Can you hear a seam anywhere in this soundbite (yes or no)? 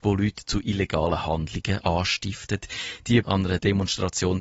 yes